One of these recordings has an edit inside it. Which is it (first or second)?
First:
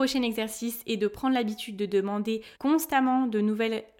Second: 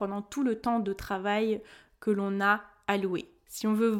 first